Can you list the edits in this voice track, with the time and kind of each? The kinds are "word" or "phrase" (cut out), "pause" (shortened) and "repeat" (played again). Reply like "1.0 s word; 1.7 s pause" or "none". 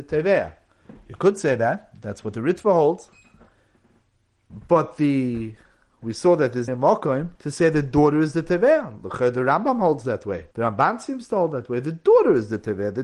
6.7 s word; 7.4 s pause; 10.5 s pause

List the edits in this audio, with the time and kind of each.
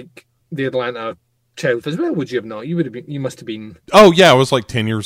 1.8 s word; 3.8 s pause

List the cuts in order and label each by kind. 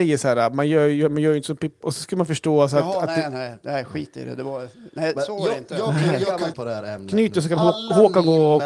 1.8 s word; 6.5 s phrase

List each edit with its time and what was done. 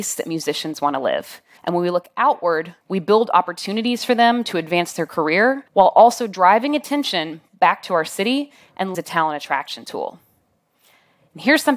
1.6 s pause; 2.8 s pause; 5.7 s pause; 8.9 s phrase

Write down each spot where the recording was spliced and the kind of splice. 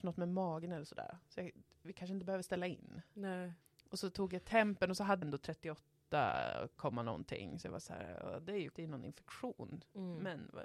3.6 s pause; 5.2 s word; 8.7 s word

